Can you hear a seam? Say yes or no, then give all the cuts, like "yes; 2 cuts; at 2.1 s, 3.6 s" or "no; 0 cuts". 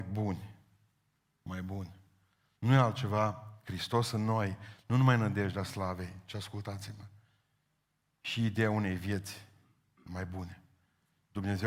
no; 0 cuts